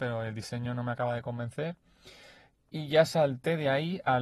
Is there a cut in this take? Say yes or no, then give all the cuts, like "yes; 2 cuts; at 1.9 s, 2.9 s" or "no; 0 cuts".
no; 0 cuts